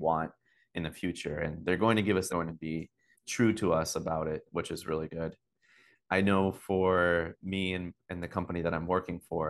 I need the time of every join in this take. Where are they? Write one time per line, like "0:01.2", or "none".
0:02.3
0:03.1